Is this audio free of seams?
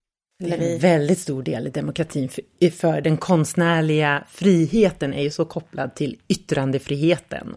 yes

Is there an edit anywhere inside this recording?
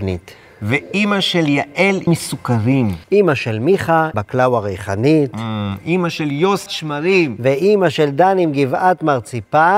yes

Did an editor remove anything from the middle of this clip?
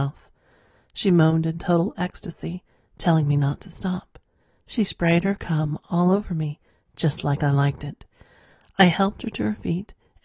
no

